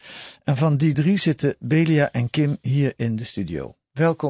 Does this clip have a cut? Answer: no; 0 cuts

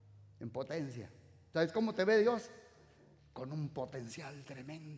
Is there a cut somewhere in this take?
no; 0 cuts

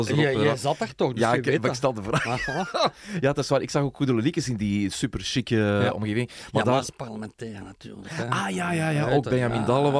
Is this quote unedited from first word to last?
yes; 0 cuts

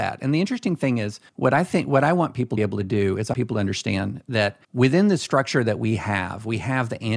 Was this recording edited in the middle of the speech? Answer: yes; 4 cuts; at 1.3 s, 2.6 s, 3.3 s, 4.6 s

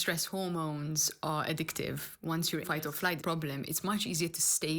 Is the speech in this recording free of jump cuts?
no; 2 cuts; at 2.6 s, 3.2 s

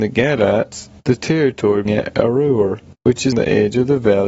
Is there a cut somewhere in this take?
yes; 3 cuts; at 1.9 s, 2.9 s, 3.3 s

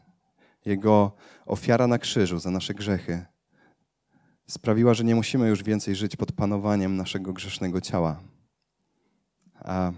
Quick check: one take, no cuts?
yes; 0 cuts

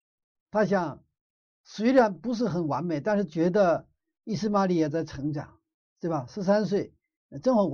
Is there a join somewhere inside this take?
no; 0 cuts

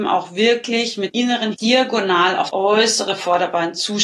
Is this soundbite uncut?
no; 3 cuts; at 1.1 s, 1.5 s, 2.5 s

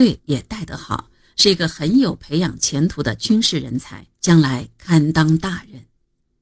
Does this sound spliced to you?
yes; 1 cut; at 4.1 s

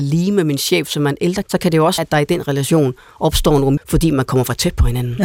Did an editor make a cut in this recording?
yes; 3 cuts; at 1.4 s, 2.0 s, 3.8 s

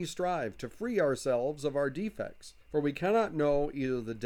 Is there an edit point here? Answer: yes; 1 cut; at 2.6 s

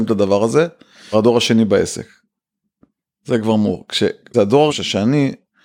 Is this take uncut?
no; 3 cuts; at 1.1 s, 4.3 s, 4.7 s

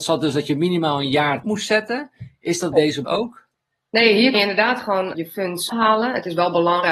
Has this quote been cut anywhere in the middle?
yes; 6 cuts; at 1.4 s, 2.7 s, 3.0 s, 4.3 s, 5.1 s, 5.7 s

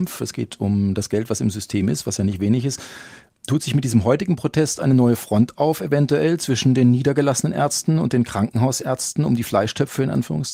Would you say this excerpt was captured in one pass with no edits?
yes; 0 cuts

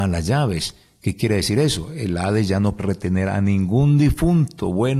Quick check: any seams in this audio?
yes; 1 cut; at 2.8 s

